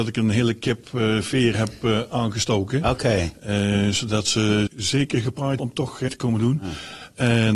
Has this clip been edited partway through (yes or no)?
yes